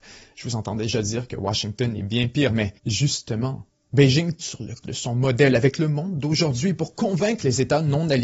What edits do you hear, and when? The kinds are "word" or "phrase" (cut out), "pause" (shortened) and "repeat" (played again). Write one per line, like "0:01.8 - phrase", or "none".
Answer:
0:02.8 - pause
0:04.4 - word
0:04.8 - word